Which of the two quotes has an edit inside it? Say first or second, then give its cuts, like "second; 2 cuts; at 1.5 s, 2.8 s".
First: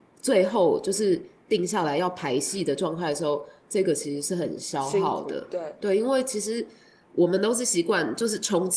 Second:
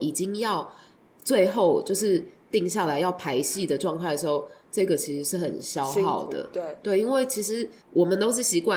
second; 1 cut; at 7.8 s